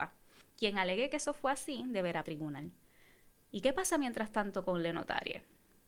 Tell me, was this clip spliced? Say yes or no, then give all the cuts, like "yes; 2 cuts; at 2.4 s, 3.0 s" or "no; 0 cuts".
yes; 1 cut; at 2.2 s